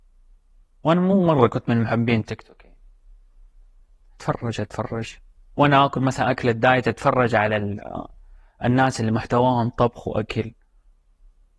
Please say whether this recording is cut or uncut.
uncut